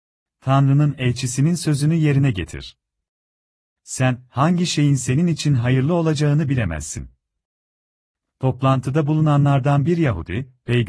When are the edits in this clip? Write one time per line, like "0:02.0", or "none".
none